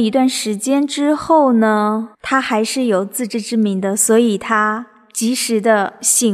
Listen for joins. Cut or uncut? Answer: cut